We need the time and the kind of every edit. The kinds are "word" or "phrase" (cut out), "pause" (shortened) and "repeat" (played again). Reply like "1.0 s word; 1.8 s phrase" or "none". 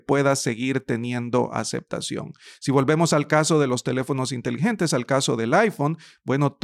none